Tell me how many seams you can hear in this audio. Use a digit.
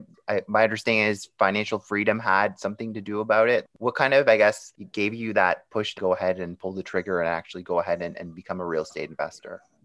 1